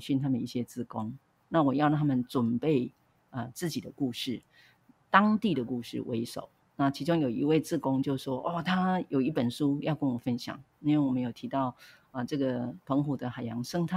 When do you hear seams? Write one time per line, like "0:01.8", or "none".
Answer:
none